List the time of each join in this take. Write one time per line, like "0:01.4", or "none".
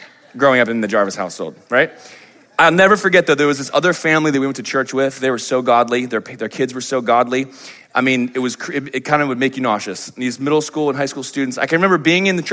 none